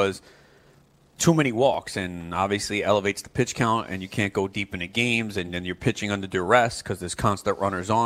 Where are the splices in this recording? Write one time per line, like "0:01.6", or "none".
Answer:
none